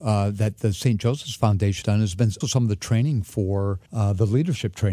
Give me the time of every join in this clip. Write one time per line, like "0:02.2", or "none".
0:01.8
0:02.4
0:03.9